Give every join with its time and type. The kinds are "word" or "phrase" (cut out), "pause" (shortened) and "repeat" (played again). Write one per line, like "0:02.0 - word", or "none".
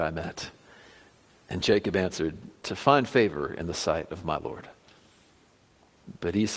none